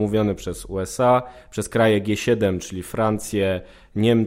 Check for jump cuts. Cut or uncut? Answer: uncut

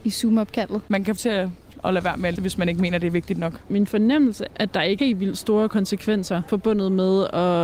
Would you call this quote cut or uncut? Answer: cut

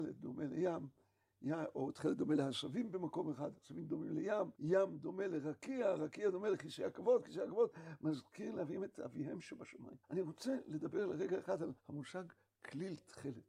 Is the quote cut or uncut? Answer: cut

